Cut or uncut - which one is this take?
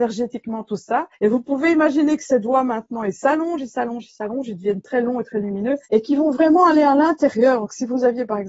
cut